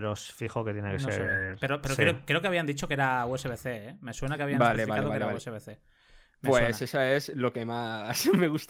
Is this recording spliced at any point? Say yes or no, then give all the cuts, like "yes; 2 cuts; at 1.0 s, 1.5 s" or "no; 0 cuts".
no; 0 cuts